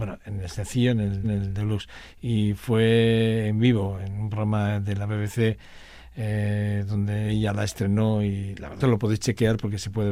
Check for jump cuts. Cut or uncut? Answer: cut